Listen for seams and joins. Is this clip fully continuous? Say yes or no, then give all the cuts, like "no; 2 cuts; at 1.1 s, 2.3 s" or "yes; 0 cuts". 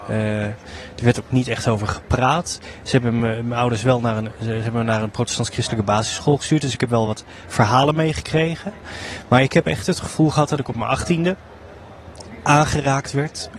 yes; 0 cuts